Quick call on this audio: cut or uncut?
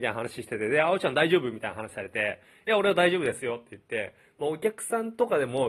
uncut